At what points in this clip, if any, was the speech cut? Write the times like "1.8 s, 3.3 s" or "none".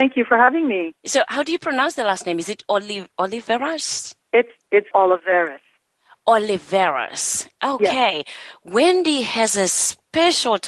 1.0 s, 3.1 s, 4.9 s

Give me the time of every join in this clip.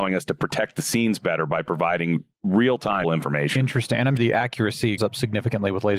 3.0 s, 4.2 s, 5.0 s

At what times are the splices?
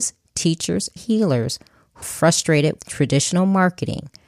1.0 s, 2.0 s, 2.8 s

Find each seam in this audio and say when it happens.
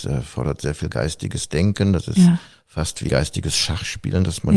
3.1 s

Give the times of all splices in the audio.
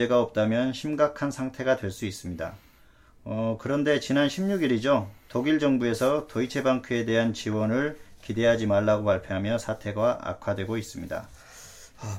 none

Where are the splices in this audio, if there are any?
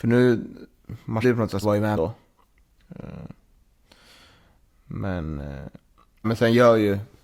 1.2 s, 1.6 s, 1.9 s, 6.2 s

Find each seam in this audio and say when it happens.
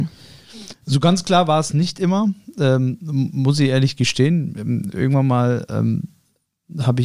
none

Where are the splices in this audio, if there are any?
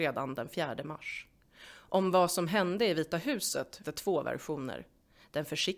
3.8 s

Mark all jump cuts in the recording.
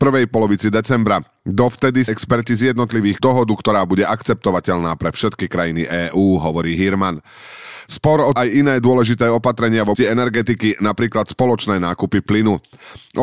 2.1 s, 3.2 s, 8.4 s, 9.9 s

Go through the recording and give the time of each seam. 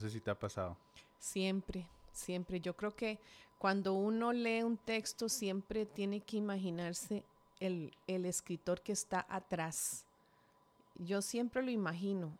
none

